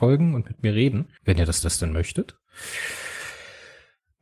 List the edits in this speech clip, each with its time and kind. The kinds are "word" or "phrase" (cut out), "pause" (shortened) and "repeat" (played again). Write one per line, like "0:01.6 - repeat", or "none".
0:01.2 - pause
0:01.6 - repeat

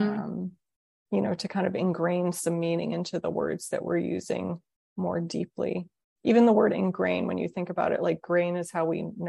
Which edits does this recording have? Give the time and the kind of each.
none

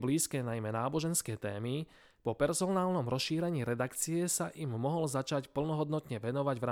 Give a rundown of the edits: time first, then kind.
none

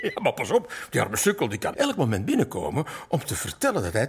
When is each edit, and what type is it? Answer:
0:01.7 - word

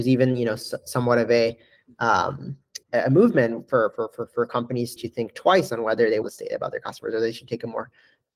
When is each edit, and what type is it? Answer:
0:02.8 - pause
0:05.0 - word
0:06.2 - phrase

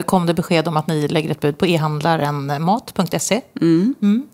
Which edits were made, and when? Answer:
none

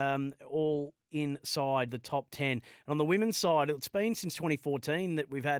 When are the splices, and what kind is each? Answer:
0:01.9 - word

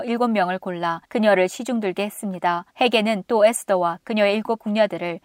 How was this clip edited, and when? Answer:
0:01.0 - pause
0:02.7 - pause

